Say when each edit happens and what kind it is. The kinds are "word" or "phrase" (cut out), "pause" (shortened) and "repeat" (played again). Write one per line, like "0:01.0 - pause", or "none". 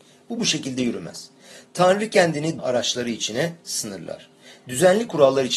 0:02.6 - word